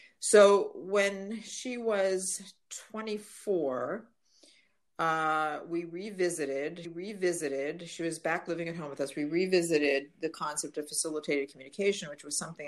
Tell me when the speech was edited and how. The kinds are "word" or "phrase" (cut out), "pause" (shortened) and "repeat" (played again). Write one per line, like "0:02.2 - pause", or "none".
0:06.8 - repeat

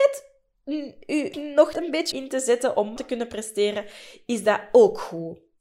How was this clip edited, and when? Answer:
0:01.3 - word
0:01.7 - word
0:02.1 - word
0:03.0 - word

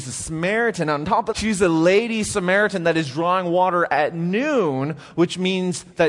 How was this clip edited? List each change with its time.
0:01.3 - word

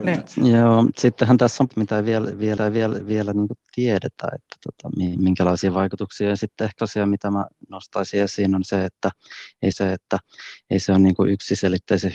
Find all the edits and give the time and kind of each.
0:01.7 - phrase
0:02.6 - repeat
0:06.8 - word
0:09.7 - repeat

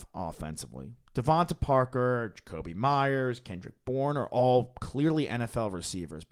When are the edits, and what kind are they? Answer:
none

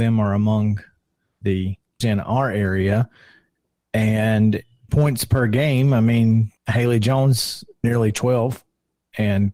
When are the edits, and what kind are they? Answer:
0:02.0 - word
0:04.9 - word
0:06.6 - pause
0:07.8 - word

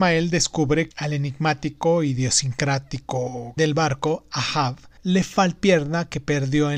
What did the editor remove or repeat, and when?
0:00.9 - word
0:03.6 - word
0:05.0 - pause
0:05.6 - word

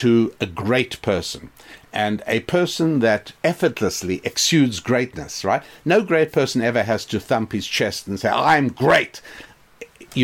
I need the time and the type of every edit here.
0:03.4 - pause

